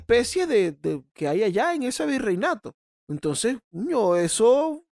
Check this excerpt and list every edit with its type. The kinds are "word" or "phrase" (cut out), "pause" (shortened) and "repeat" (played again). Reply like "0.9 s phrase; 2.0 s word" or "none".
2.9 s pause